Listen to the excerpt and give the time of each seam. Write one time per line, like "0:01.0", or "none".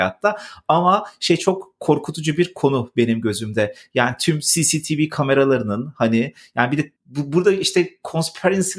0:07.0